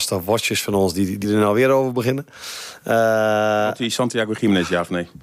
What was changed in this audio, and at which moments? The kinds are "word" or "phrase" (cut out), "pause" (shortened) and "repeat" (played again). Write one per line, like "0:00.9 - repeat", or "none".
0:01.2 - phrase